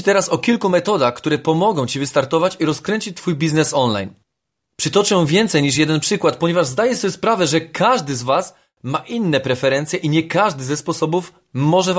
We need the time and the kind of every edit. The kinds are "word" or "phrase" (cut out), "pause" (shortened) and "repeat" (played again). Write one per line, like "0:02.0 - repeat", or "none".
none

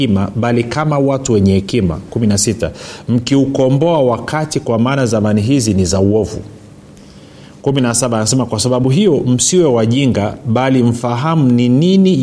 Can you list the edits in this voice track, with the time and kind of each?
none

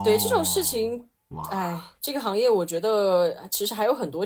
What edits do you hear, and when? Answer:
0:02.0 - pause

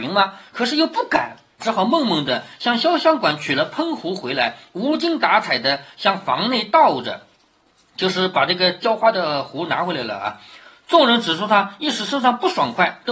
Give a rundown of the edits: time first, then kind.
none

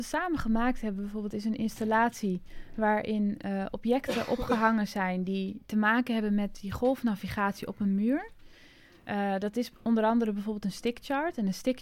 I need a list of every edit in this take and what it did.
none

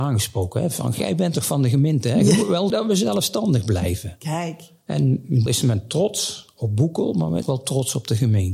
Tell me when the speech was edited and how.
0:02.7 - word
0:05.5 - word
0:07.4 - word

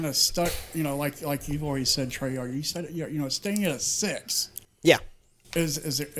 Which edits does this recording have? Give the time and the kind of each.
none

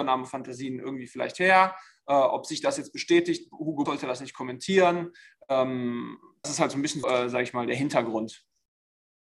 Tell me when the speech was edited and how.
0:03.9 - word
0:06.4 - word
0:07.0 - word

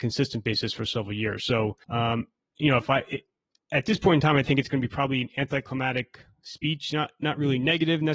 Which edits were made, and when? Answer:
0:01.8 - pause

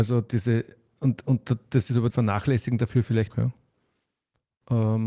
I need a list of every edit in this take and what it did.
0:02.1 - word
0:03.3 - phrase

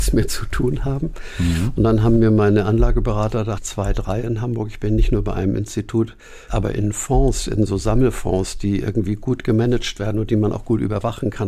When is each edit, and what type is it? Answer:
0:03.6 - word
0:06.5 - word

